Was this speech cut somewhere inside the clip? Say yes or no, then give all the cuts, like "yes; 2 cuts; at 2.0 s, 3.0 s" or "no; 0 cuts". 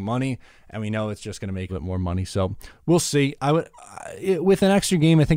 yes; 1 cut; at 1.7 s